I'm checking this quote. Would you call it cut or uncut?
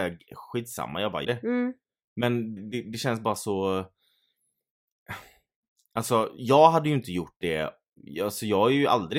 cut